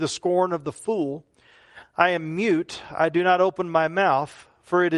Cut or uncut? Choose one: uncut